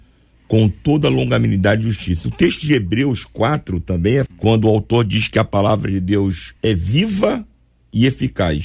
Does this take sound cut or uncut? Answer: cut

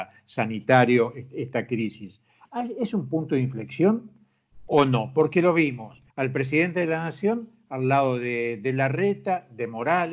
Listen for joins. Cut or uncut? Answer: cut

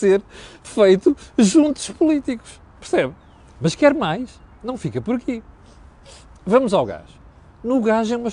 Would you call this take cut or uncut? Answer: uncut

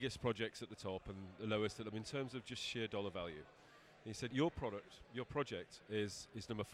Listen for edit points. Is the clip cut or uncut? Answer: cut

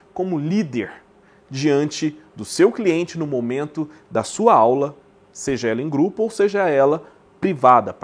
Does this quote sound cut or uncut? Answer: uncut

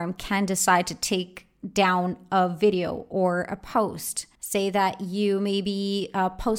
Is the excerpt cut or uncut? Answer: cut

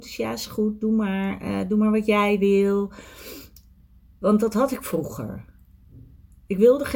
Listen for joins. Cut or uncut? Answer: uncut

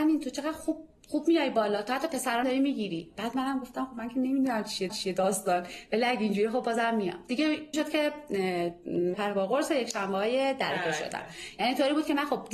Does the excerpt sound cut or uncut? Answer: cut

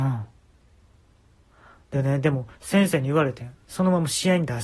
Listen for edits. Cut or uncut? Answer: cut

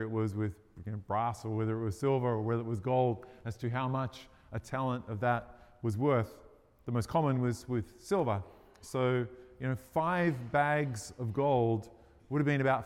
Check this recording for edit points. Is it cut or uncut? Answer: uncut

